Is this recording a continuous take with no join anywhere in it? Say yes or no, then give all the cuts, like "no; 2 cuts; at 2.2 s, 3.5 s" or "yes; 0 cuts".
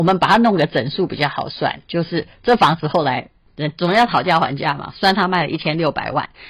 no; 1 cut; at 3.5 s